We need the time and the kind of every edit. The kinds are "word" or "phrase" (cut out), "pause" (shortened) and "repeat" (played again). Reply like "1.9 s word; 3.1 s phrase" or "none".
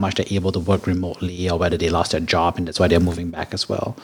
none